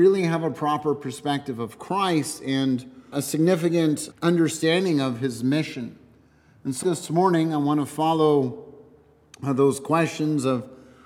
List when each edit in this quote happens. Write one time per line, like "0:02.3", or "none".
0:03.1
0:04.1
0:06.8